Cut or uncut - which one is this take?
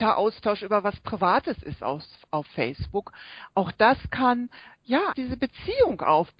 cut